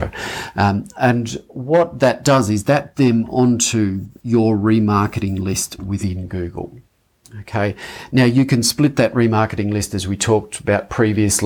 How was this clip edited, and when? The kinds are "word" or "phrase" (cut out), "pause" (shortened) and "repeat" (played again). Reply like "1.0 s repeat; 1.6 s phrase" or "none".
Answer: 2.9 s word; 4.2 s pause